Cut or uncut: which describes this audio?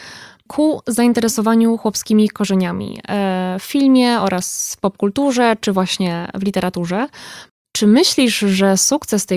uncut